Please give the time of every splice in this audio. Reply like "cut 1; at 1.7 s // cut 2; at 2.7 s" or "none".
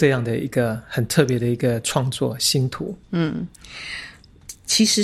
cut 1; at 3.0 s